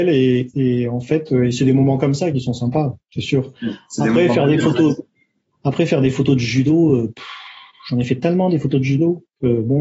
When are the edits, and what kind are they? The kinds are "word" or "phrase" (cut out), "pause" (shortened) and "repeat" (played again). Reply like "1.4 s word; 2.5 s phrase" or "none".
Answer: none